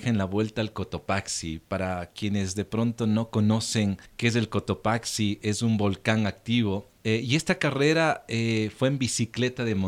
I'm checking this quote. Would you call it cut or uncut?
cut